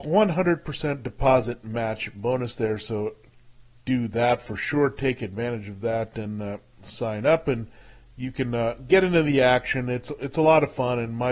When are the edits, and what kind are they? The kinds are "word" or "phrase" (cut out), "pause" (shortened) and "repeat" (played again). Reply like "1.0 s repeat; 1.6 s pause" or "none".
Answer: none